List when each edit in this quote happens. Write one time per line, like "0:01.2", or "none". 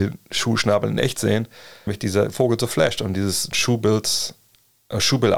0:01.9
0:03.5